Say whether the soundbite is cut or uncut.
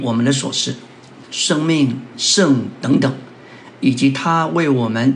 cut